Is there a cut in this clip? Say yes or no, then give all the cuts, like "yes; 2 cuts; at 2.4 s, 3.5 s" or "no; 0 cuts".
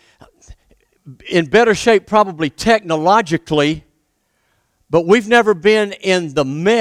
no; 0 cuts